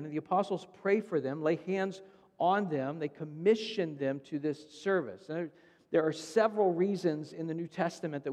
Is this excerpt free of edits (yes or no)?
yes